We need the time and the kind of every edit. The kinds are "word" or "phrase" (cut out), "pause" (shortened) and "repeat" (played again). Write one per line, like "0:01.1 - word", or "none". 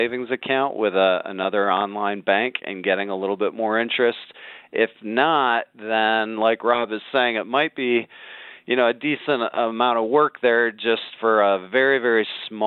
none

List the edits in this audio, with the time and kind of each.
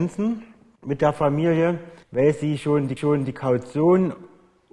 0:02.0 - pause
0:03.0 - repeat

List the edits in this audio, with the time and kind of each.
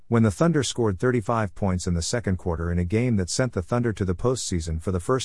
none

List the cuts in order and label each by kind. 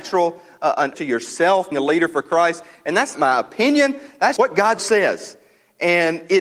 0:00.9 - word
0:01.7 - word
0:03.1 - word
0:04.4 - word
0:04.8 - word

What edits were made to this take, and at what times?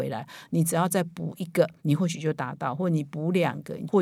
0:01.8 - pause

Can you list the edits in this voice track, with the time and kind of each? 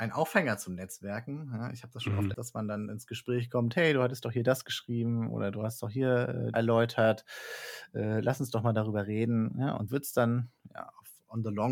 0:02.3 - word
0:06.5 - phrase
0:09.9 - word

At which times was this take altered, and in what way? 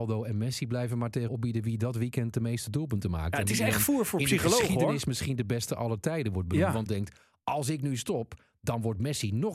0:01.3 - word
0:06.9 - word

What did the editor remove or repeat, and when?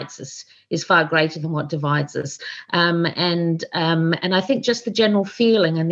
none

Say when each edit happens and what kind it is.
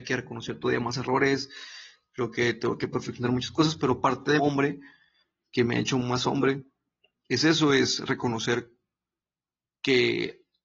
0:04.4 - phrase

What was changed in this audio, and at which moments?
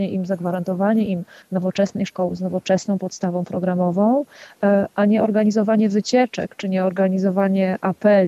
none

